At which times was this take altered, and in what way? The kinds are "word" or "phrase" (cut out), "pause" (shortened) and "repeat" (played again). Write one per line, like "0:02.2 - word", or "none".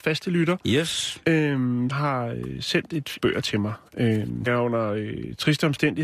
0:01.9 - word
0:03.2 - phrase
0:04.5 - word